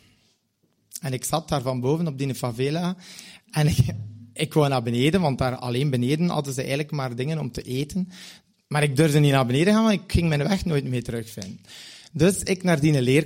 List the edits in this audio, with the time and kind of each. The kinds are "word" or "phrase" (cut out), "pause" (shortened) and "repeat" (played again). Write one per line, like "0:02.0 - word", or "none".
none